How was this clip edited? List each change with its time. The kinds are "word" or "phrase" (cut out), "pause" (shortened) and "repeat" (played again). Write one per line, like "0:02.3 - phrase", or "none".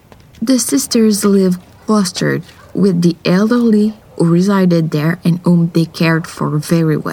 none